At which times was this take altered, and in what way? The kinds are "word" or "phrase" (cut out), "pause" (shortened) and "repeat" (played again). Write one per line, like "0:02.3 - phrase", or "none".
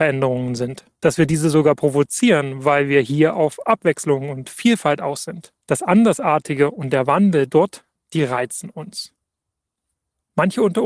0:01.0 - pause
0:05.6 - pause